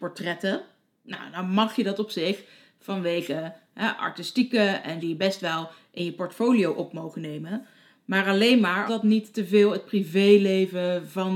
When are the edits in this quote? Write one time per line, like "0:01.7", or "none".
0:05.0
0:08.9